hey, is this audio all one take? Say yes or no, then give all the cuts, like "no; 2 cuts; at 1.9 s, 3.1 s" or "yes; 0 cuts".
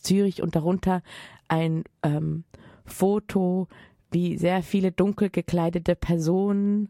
yes; 0 cuts